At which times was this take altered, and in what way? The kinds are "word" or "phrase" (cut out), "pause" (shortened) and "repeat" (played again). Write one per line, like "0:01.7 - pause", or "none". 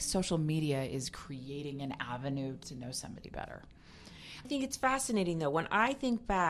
0:02.6 - word
0:04.4 - word